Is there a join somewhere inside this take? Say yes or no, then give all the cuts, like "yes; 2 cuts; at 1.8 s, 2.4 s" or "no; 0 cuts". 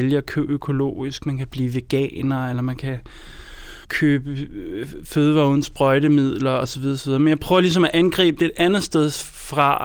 yes; 1 cut; at 3.8 s